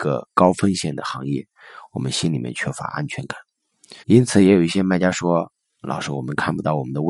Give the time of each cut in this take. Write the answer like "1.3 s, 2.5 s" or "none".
4.0 s

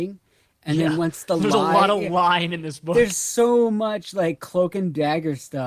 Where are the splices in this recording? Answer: none

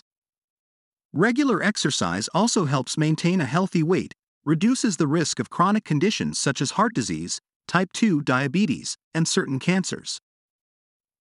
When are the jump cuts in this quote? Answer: none

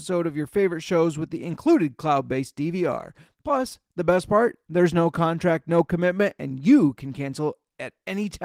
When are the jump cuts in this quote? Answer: none

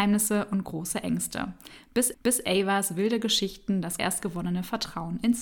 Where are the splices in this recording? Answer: 2.1 s, 4.0 s

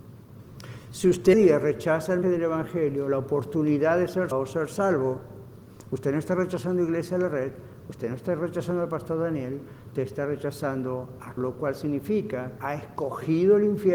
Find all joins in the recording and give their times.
1.3 s, 2.2 s, 4.3 s, 10.0 s, 11.4 s, 12.6 s

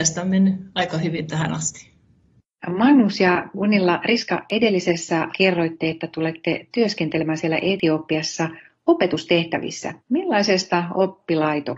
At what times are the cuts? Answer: 5.3 s, 10.0 s

